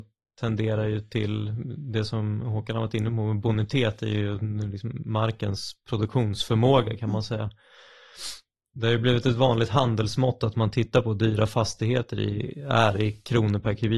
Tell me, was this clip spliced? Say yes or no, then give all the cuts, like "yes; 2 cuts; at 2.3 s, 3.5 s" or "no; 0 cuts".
no; 0 cuts